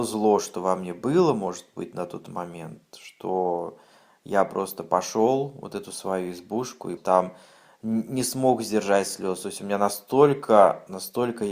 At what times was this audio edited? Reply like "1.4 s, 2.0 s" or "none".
7.0 s